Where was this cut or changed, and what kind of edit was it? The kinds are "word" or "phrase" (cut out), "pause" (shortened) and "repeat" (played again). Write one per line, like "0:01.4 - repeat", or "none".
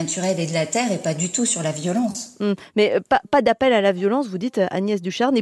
none